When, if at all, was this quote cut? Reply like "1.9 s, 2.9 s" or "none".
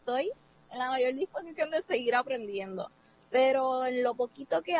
none

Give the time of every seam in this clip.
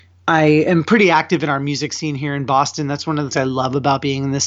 3.3 s

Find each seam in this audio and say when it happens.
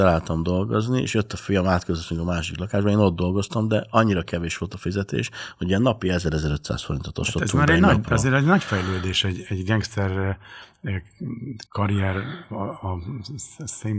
11.7 s

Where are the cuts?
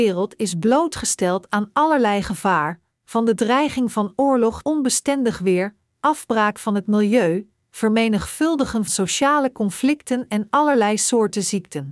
4.6 s, 8.9 s

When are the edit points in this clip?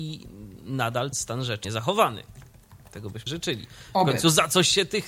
1.1 s, 1.6 s, 3.3 s

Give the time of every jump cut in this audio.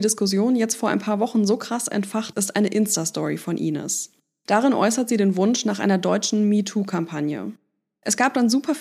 2.3 s

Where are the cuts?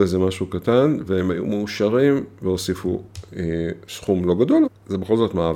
4.7 s

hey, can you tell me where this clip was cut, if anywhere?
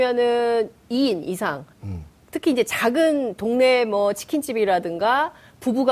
1.7 s

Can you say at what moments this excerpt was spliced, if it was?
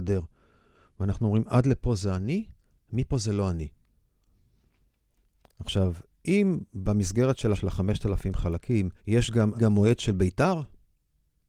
7.5 s, 9.0 s, 9.5 s

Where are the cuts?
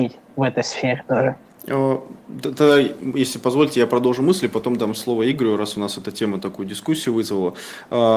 1.4 s

